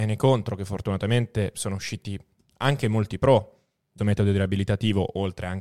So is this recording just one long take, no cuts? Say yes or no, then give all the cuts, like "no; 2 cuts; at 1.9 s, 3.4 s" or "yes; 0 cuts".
no; 1 cut; at 4.0 s